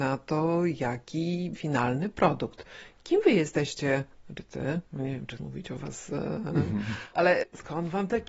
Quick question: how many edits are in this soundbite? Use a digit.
4